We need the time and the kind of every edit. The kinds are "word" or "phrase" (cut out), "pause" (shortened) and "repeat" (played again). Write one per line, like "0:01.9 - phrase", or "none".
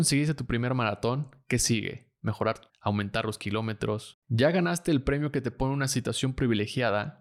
0:02.7 - word